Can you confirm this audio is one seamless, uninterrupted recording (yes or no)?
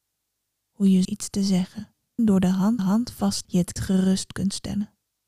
no